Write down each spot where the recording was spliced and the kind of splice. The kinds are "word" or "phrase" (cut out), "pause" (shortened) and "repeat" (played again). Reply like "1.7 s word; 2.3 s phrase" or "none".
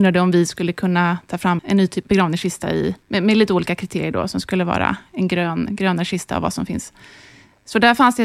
1.6 s word; 2.0 s word; 3.0 s pause